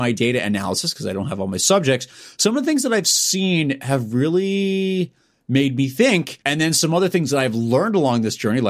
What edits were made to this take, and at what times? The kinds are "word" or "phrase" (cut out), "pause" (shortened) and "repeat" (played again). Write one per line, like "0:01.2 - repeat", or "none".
0:06.4 - pause